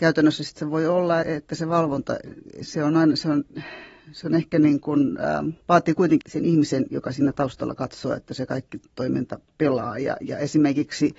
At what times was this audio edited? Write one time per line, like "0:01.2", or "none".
0:01.2
0:05.6
0:06.2

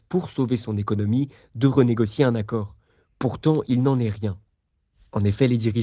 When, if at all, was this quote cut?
none

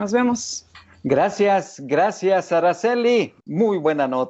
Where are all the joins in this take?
0:03.4

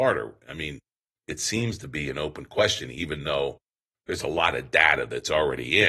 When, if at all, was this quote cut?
none

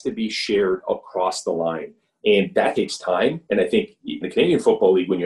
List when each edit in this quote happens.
0:02.7
0:04.2

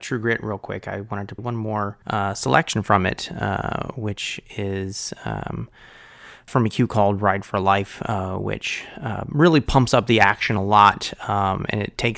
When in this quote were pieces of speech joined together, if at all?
0:01.4
0:02.0
0:06.5

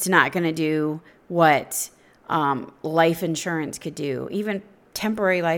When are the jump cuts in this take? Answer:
none

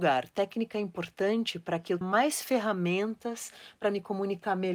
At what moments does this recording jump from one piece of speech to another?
0:02.0

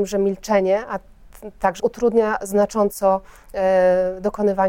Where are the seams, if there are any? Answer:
0:01.8

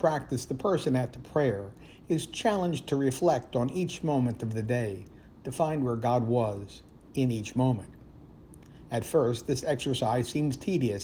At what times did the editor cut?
none

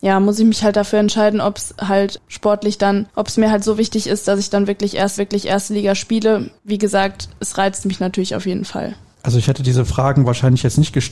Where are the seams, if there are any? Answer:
0:03.1
0:05.2
0:06.6
0:09.1

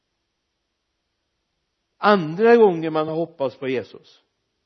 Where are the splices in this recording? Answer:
none

